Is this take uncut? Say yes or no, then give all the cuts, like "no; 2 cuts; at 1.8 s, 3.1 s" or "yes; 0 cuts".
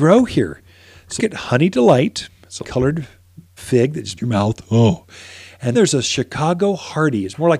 no; 5 cuts; at 1.2 s, 2.6 s, 3.6 s, 4.2 s, 5.7 s